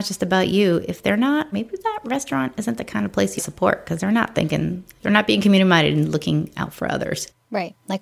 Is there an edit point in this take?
yes; 2 cuts; at 1.5 s, 3.4 s

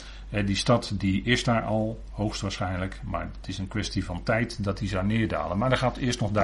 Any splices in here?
no; 0 cuts

